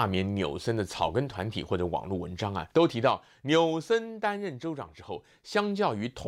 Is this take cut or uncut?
cut